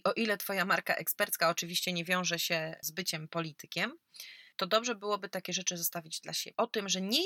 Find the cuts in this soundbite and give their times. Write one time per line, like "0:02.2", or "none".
0:04.5